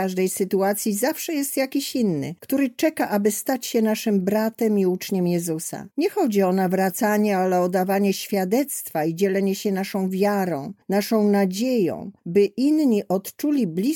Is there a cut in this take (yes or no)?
yes